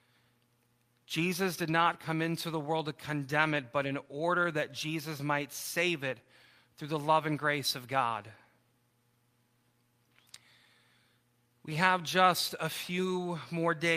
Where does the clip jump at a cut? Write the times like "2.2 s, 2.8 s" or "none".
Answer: none